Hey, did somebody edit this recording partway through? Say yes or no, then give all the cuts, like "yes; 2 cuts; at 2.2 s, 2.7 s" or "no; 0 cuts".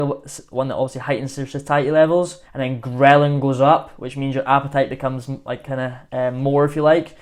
yes; 2 cuts; at 2.4 s, 6.1 s